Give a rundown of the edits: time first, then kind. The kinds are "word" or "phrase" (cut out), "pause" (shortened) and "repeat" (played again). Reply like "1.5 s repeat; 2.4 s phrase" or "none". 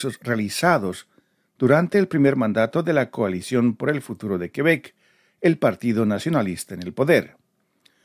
none